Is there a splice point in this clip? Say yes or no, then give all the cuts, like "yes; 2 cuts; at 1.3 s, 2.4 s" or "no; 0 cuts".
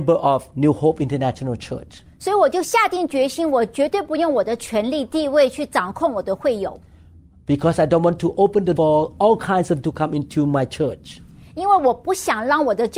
yes; 2 cuts; at 8.8 s, 9.8 s